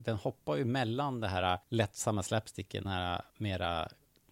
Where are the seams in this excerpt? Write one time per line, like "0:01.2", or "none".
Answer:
0:01.6
0:02.8
0:03.3